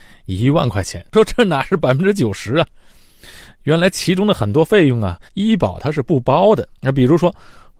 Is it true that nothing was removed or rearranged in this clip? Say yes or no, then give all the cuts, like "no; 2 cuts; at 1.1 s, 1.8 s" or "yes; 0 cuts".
no; 3 cuts; at 1.1 s, 5.3 s, 6.8 s